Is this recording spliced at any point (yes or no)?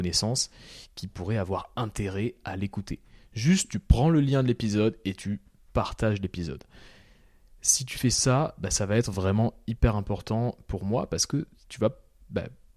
no